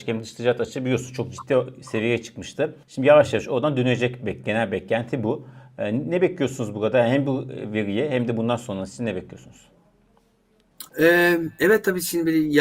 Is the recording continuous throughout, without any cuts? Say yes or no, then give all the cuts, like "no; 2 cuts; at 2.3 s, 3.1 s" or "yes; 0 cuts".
no; 2 cuts; at 2.8 s, 10.9 s